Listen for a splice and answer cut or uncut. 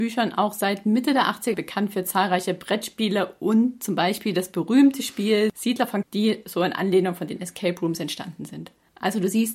cut